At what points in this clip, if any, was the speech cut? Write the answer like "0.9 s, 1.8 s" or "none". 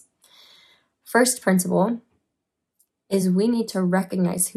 none